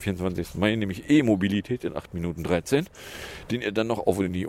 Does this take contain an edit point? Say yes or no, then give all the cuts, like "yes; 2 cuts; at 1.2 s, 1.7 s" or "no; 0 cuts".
no; 0 cuts